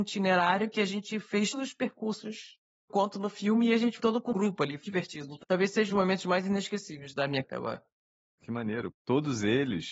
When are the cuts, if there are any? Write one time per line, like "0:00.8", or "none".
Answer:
0:01.5
0:02.9
0:04.0
0:04.3
0:04.8
0:05.4
0:05.9
0:07.4
0:08.9

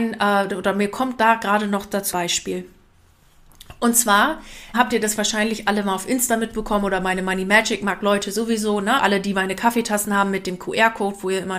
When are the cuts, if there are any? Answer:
0:02.1
0:04.7
0:09.0

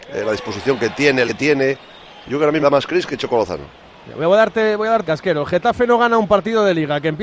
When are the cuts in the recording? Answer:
0:01.3
0:02.6
0:05.1

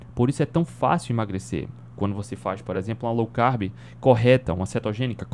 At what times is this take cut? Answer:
none

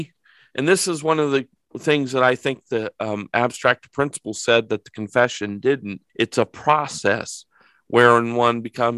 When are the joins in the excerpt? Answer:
0:06.1

